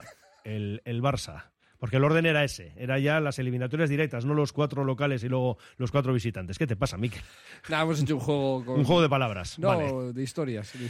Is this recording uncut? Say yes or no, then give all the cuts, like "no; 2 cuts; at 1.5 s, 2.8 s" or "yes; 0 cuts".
yes; 0 cuts